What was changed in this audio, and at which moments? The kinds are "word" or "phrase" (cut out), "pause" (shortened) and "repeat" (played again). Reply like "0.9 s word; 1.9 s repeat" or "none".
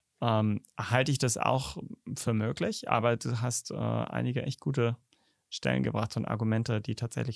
none